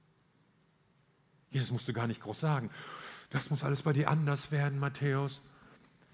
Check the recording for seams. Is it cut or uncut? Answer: uncut